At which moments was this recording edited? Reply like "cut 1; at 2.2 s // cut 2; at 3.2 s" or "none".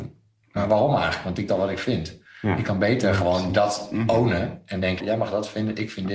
cut 1; at 1.5 s // cut 2; at 5.0 s